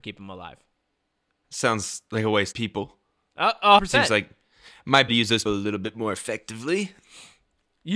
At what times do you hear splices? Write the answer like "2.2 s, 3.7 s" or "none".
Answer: 1.4 s, 2.5 s, 3.8 s, 5.1 s, 5.5 s